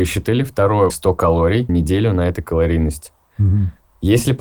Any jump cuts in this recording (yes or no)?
yes